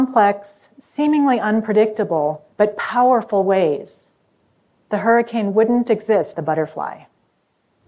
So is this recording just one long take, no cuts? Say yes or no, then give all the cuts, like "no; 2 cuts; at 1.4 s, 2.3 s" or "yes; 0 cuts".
no; 2 cuts; at 2.5 s, 6.3 s